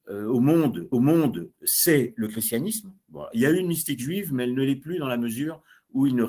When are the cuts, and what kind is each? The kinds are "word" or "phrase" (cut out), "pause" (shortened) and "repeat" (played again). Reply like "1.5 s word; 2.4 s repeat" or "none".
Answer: 0.9 s repeat